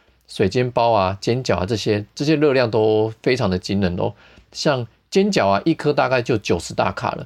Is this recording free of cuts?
yes; 0 cuts

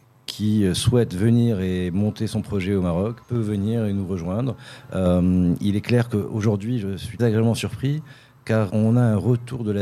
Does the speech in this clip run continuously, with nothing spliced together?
no; 3 cuts; at 3.2 s, 7.2 s, 8.7 s

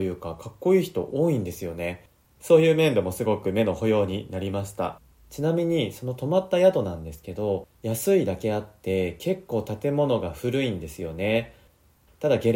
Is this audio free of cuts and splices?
no; 3 cuts; at 2.2 s, 5.1 s, 7.7 s

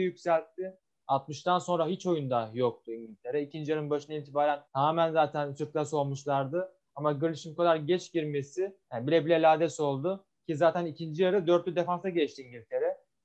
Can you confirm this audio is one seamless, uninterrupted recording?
no; 2 cuts; at 4.7 s, 8.8 s

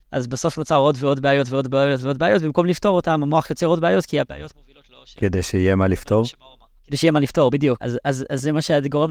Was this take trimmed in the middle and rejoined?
no; 0 cuts

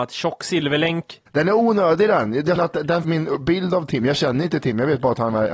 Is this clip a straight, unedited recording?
no; 3 cuts; at 1.3 s, 2.6 s, 3.0 s

